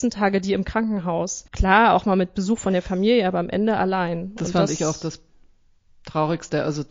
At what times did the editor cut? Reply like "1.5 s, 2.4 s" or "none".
1.5 s